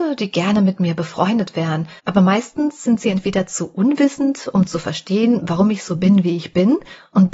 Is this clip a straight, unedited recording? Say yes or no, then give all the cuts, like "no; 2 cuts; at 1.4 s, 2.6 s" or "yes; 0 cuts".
no; 1 cut; at 2.0 s